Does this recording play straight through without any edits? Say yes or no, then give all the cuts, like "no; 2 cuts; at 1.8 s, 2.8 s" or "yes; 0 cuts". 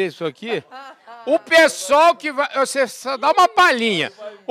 yes; 0 cuts